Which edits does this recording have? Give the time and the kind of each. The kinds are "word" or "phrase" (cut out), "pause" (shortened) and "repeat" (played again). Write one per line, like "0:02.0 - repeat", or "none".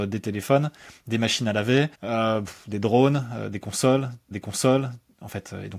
0:01.9 - pause
0:04.3 - repeat

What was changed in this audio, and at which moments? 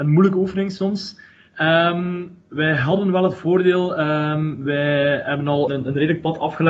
0:05.7 - word

